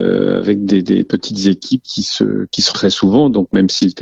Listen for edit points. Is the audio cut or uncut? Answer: cut